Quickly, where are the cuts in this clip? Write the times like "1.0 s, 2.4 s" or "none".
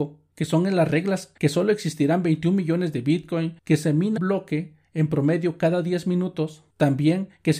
1.4 s, 3.6 s, 4.2 s